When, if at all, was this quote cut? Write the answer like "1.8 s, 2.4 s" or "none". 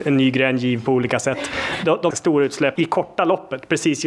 2.1 s, 2.8 s